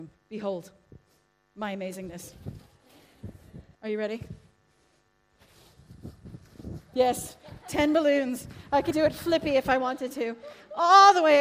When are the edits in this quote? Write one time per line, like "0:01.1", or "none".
0:03.7
0:08.9